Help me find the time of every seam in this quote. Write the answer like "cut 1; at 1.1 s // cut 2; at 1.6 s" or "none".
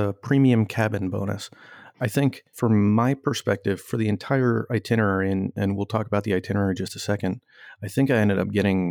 none